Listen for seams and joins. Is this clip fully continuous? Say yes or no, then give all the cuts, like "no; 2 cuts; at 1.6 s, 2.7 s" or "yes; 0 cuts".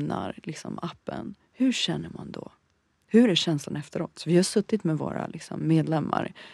yes; 0 cuts